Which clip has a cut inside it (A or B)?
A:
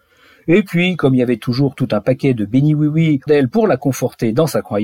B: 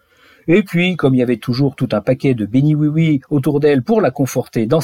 A